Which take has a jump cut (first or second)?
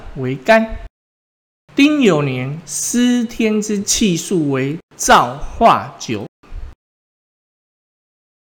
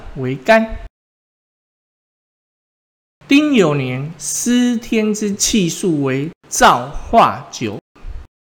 first